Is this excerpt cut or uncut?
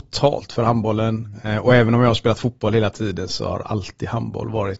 uncut